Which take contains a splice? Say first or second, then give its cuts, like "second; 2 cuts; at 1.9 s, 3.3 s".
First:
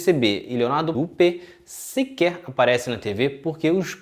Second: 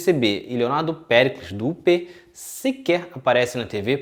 first; 1 cut; at 0.9 s